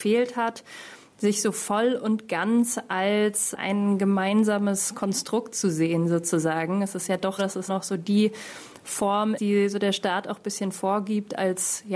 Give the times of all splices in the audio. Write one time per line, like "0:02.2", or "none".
0:07.4
0:07.7
0:09.4